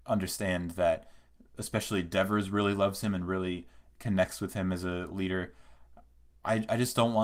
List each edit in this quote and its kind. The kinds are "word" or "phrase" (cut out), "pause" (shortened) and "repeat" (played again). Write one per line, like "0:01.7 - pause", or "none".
none